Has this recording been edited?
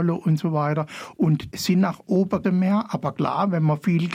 yes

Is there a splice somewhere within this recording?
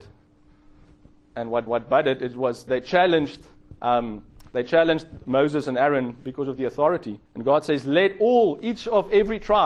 yes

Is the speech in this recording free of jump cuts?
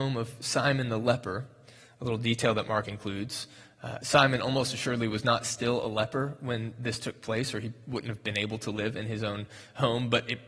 yes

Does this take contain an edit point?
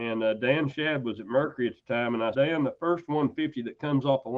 yes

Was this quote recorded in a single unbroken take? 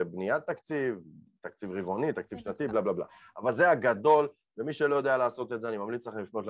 yes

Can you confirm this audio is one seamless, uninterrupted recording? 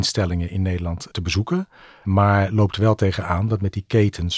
yes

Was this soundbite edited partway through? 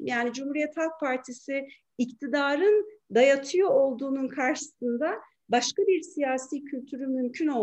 no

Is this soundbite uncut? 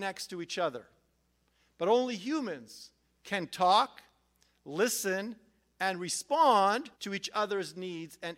no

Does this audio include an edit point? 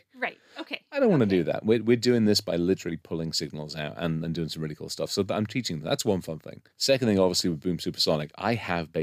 yes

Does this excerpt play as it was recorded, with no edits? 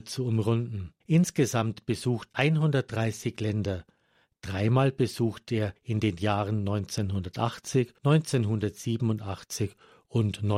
no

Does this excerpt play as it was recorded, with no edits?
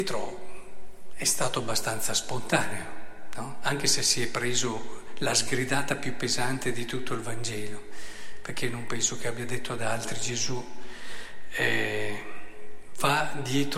yes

